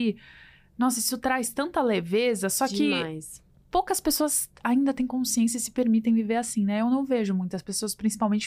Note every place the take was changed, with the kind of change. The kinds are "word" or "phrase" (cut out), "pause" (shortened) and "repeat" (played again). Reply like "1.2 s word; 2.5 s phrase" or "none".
none